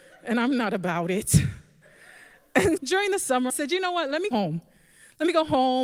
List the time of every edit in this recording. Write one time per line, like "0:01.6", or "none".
0:02.8
0:03.5
0:04.3